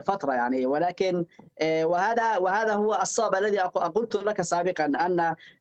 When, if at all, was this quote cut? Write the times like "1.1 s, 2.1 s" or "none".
none